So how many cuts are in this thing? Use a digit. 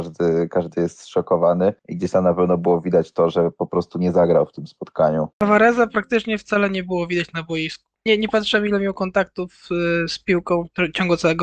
3